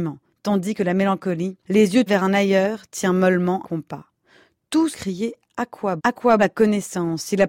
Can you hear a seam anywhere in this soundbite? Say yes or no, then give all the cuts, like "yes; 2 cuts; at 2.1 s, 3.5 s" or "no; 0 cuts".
yes; 6 cuts; at 1.6 s, 2.1 s, 3.6 s, 4.9 s, 6.0 s, 6.4 s